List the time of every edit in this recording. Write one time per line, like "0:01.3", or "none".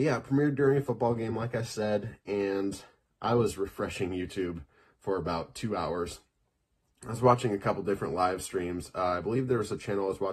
none